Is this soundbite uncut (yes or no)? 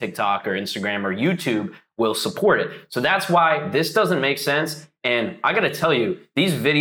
yes